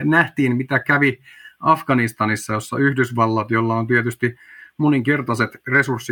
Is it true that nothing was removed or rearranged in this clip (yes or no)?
yes